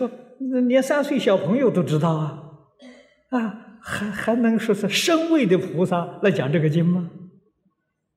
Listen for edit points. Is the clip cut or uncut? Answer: uncut